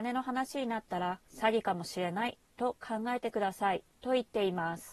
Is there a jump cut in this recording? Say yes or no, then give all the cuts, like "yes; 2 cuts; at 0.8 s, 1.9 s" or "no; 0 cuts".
yes; 1 cut; at 1.3 s